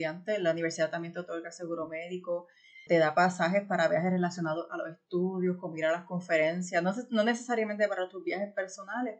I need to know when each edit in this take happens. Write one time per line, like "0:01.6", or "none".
0:02.9